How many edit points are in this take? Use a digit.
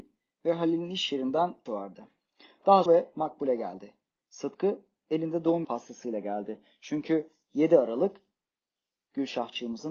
3